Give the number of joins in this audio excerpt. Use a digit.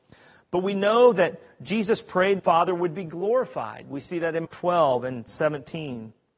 2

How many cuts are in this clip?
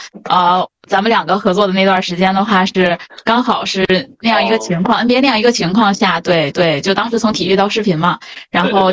1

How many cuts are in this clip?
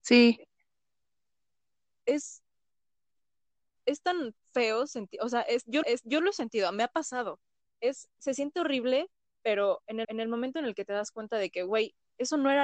2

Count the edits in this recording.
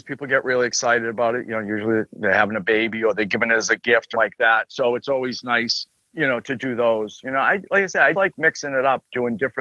2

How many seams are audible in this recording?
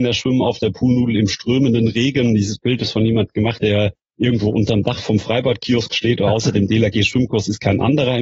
1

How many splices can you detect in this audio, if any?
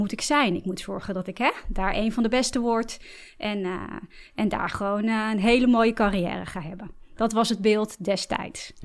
0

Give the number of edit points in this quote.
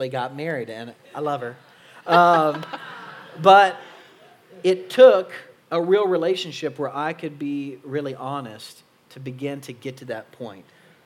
1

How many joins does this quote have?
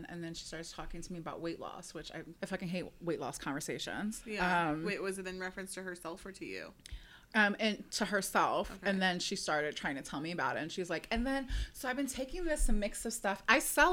1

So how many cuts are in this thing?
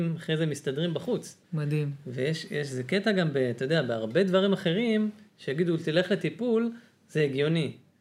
1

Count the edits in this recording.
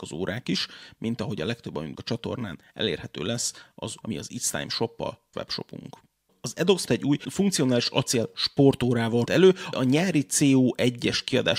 6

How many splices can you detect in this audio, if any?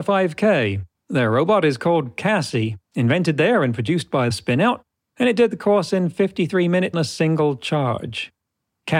4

